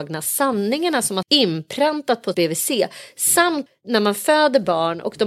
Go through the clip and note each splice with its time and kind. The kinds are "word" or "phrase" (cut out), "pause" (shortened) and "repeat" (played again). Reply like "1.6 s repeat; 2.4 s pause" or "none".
1.2 s word; 2.3 s word; 3.7 s word